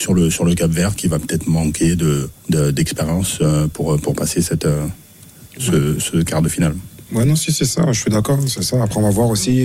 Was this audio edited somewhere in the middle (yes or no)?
yes